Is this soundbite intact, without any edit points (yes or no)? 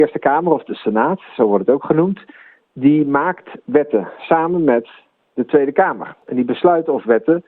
yes